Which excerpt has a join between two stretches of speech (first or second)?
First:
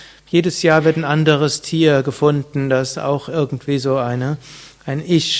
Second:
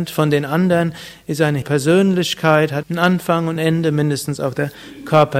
second